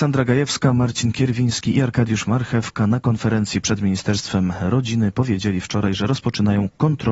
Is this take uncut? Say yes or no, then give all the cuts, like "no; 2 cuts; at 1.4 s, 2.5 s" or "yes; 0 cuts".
yes; 0 cuts